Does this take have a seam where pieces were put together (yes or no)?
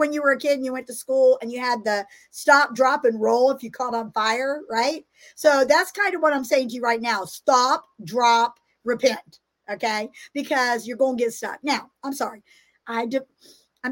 no